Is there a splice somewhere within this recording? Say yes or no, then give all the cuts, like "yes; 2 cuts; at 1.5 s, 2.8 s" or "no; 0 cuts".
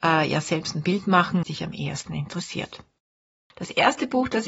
yes; 1 cut; at 1.4 s